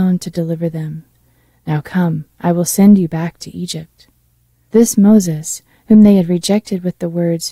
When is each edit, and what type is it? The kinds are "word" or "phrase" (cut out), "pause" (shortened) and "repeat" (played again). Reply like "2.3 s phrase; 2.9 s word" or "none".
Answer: none